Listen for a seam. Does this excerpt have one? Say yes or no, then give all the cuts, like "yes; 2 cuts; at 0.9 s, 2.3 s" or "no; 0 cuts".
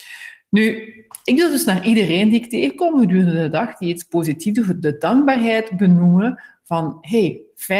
no; 0 cuts